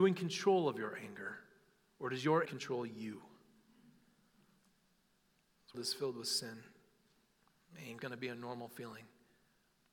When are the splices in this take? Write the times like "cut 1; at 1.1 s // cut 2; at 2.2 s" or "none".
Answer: cut 1; at 2.5 s // cut 2; at 5.7 s // cut 3; at 8.0 s